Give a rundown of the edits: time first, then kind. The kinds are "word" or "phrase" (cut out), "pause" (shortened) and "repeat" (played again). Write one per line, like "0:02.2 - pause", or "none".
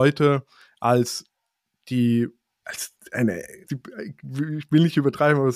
0:02.6 - word
0:03.7 - word